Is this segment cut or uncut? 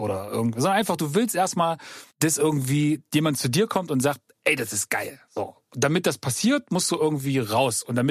cut